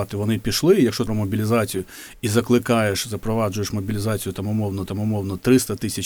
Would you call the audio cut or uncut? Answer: cut